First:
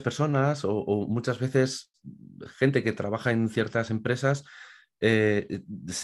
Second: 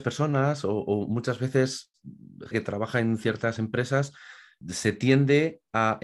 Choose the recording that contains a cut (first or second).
second